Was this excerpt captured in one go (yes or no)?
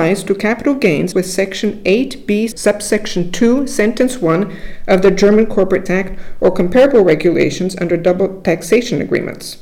no